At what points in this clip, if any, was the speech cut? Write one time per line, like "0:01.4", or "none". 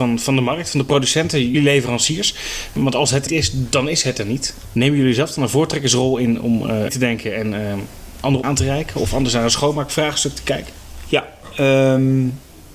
0:01.5
0:03.3
0:06.9
0:08.4